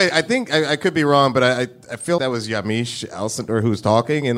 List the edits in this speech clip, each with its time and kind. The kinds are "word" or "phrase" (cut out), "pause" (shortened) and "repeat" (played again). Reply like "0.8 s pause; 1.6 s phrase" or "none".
2.2 s word

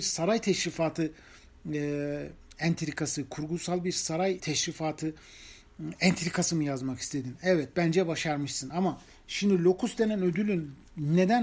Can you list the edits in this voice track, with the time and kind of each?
4.4 s word

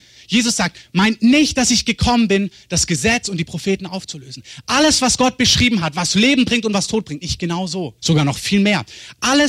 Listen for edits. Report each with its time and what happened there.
7.2 s word; 8.0 s pause

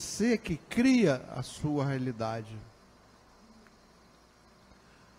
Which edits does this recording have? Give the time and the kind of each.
none

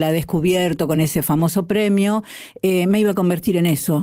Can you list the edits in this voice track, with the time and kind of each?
none

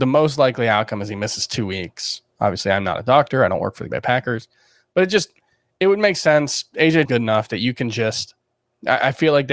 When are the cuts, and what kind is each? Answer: 3.9 s word; 7.1 s word

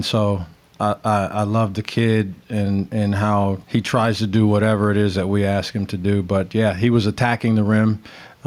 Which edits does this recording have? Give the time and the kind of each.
3.6 s pause

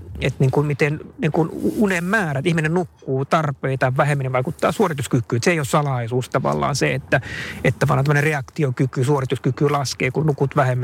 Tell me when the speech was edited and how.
none

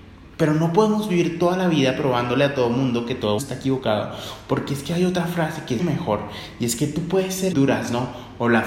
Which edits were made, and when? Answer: 3.4 s word; 5.8 s word; 7.5 s word

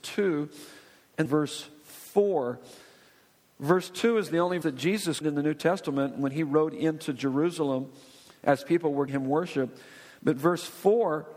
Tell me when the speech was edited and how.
1.3 s word; 4.6 s word; 5.2 s word; 9.1 s word

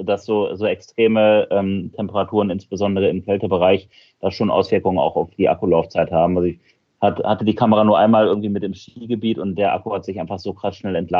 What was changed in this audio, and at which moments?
none

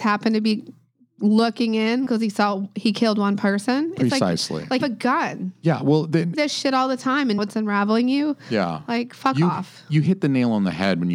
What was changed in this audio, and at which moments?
2.1 s phrase; 4.8 s phrase; 6.3 s phrase; 7.4 s word

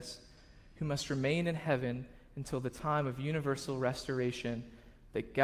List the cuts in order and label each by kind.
none

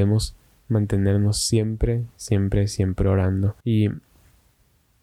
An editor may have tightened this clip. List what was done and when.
3.6 s pause

